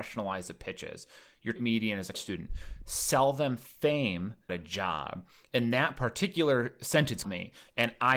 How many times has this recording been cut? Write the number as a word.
four